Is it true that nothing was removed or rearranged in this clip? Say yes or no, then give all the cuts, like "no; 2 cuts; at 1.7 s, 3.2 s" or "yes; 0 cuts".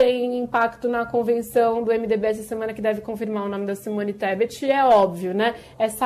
yes; 0 cuts